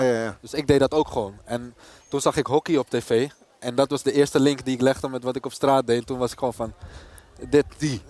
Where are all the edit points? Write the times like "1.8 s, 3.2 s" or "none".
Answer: none